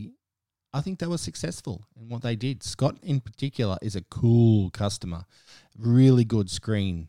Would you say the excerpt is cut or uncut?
uncut